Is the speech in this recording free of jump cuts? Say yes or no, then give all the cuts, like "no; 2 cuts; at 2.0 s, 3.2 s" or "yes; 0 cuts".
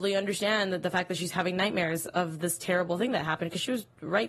yes; 0 cuts